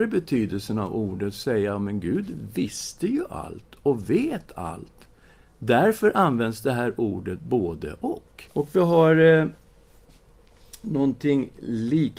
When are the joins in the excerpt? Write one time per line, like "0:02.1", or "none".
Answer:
0:08.5

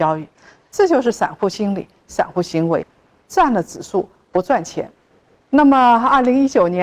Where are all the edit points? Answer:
none

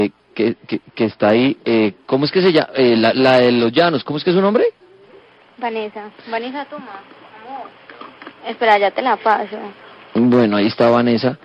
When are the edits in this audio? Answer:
none

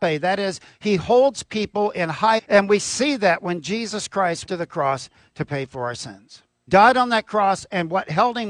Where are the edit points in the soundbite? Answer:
0:02.4
0:04.5
0:06.7

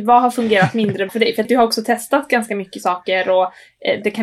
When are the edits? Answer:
0:01.1
0:01.4

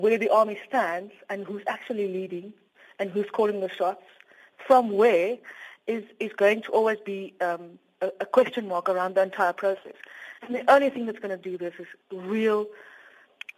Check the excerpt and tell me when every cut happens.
0:12.0

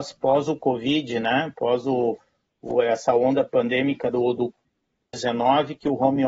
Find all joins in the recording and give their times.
none

